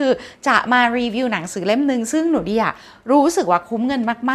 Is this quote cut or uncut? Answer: uncut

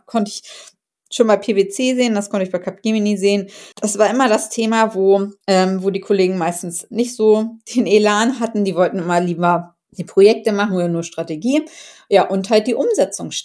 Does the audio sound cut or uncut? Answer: cut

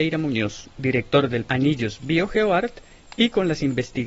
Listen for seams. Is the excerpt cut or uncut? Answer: cut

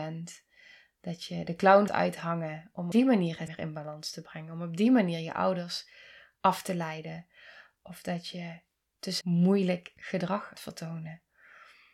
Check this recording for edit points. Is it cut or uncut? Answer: cut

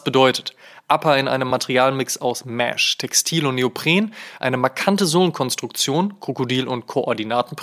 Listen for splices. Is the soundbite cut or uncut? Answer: uncut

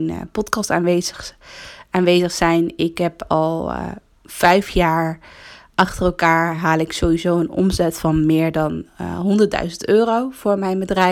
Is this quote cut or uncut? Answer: uncut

